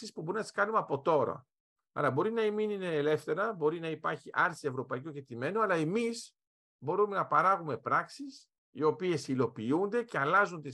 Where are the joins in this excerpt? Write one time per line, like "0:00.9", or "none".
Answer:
0:08.6